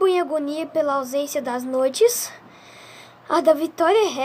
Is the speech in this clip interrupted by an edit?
no; 0 cuts

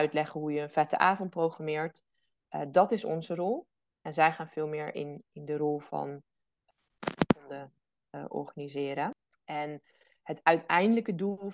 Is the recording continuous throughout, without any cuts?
yes; 0 cuts

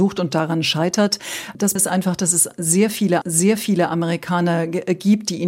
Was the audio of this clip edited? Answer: yes; 2 cuts; at 1.8 s, 3.2 s

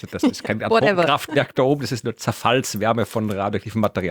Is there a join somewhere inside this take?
no; 0 cuts

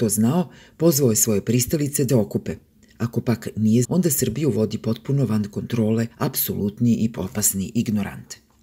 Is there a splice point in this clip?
yes; 4 cuts; at 2.1 s, 3.8 s, 6.1 s, 7.2 s

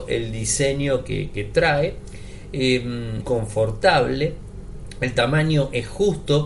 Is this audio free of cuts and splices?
no; 1 cut; at 3.2 s

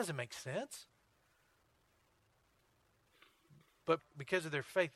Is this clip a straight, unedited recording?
no; 1 cut; at 4.0 s

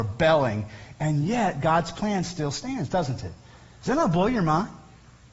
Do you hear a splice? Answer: no; 0 cuts

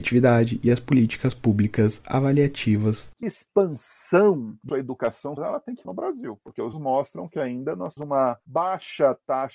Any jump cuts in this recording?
yes; 6 cuts; at 3.2 s, 4.7 s, 5.4 s, 5.8 s, 6.7 s, 8.0 s

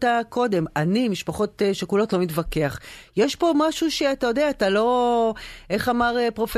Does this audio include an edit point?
no; 0 cuts

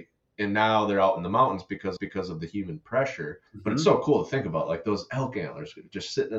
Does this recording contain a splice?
yes; 2 cuts; at 2.0 s, 3.5 s

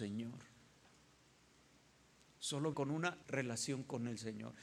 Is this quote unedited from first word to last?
no; 2 cuts; at 2.7 s, 3.2 s

